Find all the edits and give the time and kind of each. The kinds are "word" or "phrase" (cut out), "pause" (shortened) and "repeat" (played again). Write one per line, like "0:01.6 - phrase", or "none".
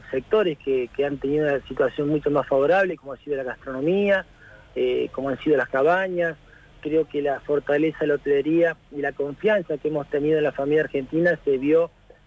none